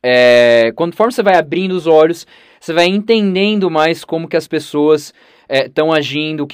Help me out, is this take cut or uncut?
uncut